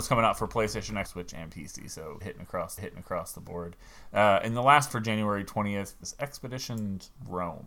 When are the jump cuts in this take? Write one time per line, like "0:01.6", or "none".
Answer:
0:01.1
0:02.2
0:02.8
0:04.9
0:06.0